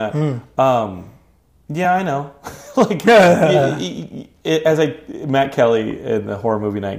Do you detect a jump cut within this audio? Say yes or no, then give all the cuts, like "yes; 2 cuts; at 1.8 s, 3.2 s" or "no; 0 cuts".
no; 0 cuts